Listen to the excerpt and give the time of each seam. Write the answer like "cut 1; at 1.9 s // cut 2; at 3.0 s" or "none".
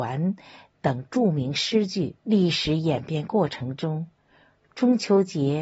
cut 1; at 2.2 s